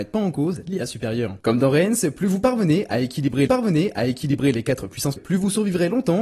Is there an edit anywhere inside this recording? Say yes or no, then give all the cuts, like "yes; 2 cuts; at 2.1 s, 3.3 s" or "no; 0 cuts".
yes; 2 cuts; at 3.5 s, 5.2 s